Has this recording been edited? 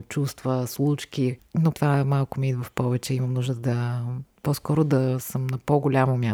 yes; 2 cuts; at 1.7 s, 4.3 s

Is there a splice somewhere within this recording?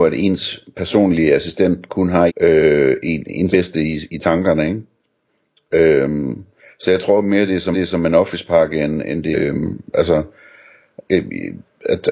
yes; 4 cuts; at 2.3 s, 3.5 s, 7.7 s, 9.3 s

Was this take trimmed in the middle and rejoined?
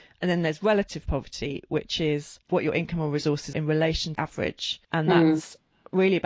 yes; 4 cuts; at 2.4 s, 3.5 s, 4.2 s, 4.8 s

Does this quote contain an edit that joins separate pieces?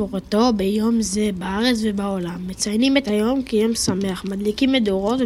no; 0 cuts

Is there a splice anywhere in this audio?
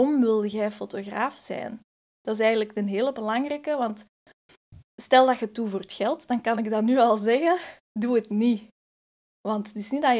no; 0 cuts

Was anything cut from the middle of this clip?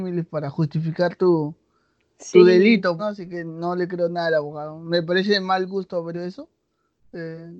yes; 2 cuts; at 3.0 s, 6.1 s

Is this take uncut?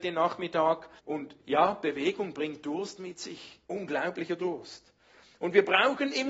no; 2 cuts; at 1.0 s, 3.6 s

